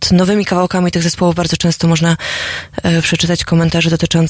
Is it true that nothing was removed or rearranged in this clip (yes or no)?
yes